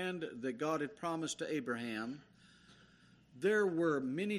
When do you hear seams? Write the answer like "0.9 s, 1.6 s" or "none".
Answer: none